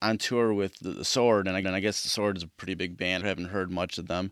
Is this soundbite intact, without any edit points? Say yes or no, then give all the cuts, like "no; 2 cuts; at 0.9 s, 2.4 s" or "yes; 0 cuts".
no; 2 cuts; at 1.6 s, 3.2 s